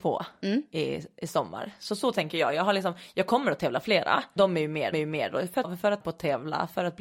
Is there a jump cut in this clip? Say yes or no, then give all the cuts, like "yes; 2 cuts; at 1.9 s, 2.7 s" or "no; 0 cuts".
yes; 4 cuts; at 4.4 s, 4.9 s, 5.6 s, 6.0 s